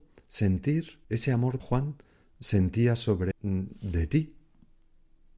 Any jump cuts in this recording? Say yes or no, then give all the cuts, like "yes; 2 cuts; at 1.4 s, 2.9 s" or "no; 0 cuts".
yes; 3 cuts; at 1.0 s, 1.6 s, 3.3 s